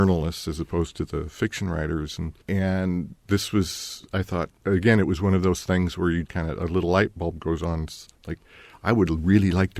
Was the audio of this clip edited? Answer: yes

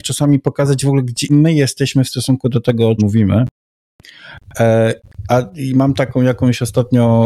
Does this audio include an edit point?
yes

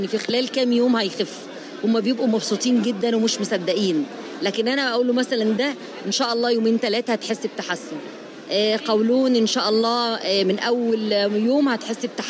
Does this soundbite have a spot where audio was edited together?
no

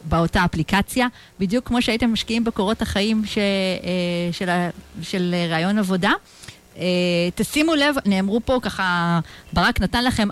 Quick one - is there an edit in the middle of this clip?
no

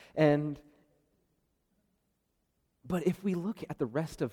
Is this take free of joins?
yes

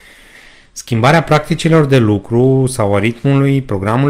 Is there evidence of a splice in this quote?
no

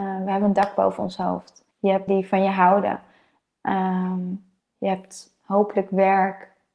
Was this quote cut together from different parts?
yes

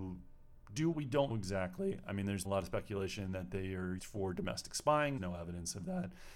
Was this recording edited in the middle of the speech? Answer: yes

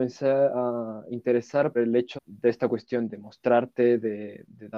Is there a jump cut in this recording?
yes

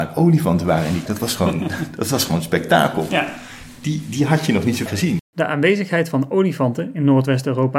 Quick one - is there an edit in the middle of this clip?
yes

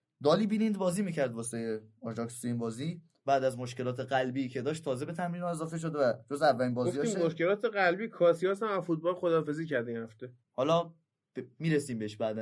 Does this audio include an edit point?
yes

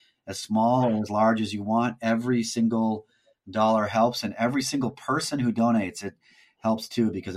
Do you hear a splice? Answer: no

